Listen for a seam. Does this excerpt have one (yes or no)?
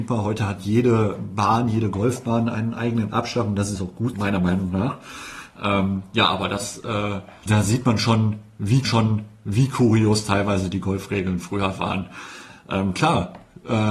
yes